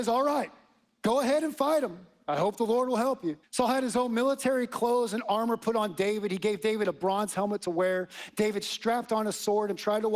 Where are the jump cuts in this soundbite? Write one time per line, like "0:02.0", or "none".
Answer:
0:03.4